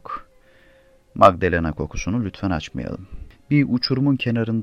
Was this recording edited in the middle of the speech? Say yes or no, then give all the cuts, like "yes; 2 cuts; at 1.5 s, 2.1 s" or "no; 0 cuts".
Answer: no; 0 cuts